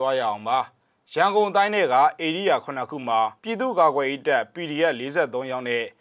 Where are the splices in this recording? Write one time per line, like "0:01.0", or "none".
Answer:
0:03.4